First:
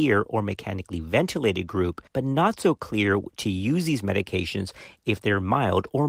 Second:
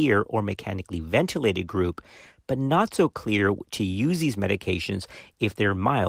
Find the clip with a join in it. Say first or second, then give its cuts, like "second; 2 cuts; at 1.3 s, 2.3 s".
first; 1 cut; at 2.1 s